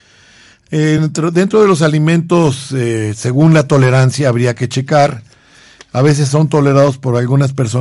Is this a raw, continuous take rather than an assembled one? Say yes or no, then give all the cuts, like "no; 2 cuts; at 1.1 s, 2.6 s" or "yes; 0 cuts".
yes; 0 cuts